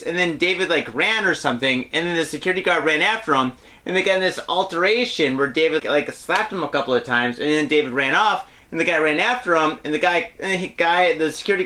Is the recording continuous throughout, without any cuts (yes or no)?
no